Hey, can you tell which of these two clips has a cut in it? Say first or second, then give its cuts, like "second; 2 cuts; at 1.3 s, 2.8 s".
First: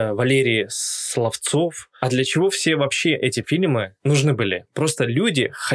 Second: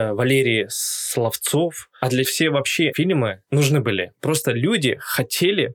second; 2 cuts; at 2.2 s, 2.9 s